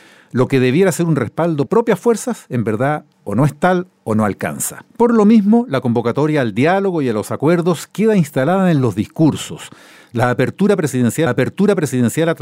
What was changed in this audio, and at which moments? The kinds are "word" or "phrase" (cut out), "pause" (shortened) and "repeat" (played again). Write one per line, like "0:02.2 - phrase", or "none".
0:01.7 - phrase
0:03.1 - pause
0:04.9 - pause
0:11.3 - repeat